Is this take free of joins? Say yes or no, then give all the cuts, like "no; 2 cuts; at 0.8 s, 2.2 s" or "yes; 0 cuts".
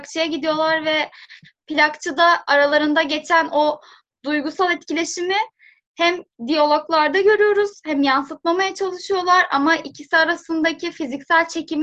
yes; 0 cuts